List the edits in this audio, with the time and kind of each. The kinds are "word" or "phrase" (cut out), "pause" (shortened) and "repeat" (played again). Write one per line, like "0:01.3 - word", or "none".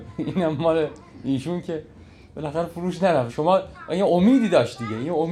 0:03.3 - word